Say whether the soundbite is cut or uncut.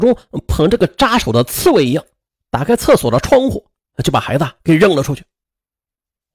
uncut